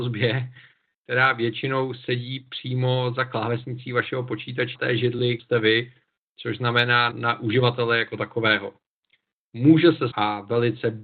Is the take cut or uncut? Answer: cut